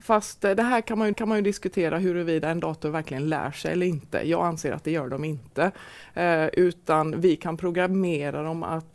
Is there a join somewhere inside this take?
yes; 1 cut; at 1.1 s

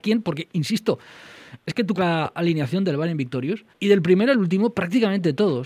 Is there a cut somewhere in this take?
yes; 2 cuts; at 2.0 s, 3.7 s

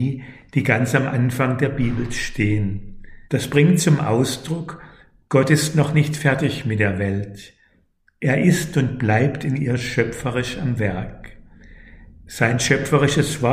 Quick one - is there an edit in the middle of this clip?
yes; 1 cut; at 3.3 s

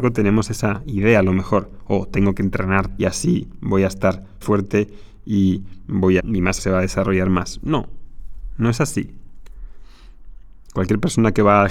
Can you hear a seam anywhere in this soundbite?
yes; 4 cuts; at 3.0 s, 4.4 s, 6.2 s, 6.6 s

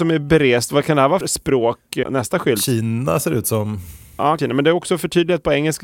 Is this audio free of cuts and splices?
no; 2 cuts; at 1.2 s, 4.4 s

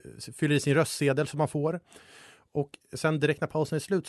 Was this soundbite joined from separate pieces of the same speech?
no; 0 cuts

